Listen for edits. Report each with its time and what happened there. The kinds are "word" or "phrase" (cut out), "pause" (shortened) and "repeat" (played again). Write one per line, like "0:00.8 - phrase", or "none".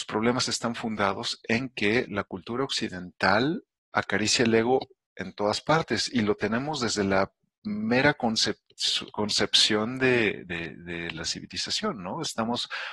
none